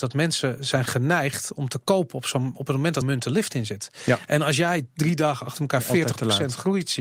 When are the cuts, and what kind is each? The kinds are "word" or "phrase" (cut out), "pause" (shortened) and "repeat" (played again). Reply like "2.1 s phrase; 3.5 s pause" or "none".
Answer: 3.0 s word